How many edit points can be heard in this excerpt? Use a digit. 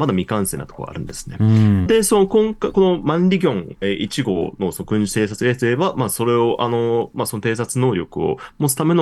2